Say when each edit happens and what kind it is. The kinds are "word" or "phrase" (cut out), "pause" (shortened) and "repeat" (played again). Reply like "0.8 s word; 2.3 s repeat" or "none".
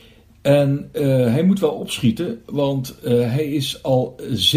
none